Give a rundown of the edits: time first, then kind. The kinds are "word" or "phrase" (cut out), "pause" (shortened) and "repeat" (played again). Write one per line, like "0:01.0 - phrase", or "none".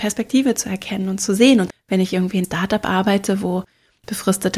0:01.7 - word
0:02.4 - word